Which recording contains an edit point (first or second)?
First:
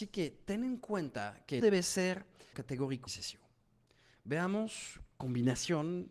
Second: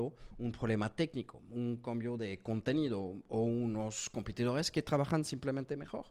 first